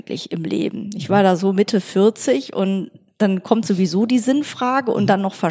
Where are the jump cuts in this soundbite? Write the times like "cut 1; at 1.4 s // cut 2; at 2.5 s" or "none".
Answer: none